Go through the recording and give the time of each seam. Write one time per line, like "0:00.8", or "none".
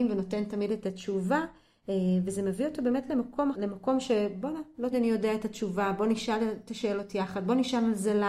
0:03.5
0:04.9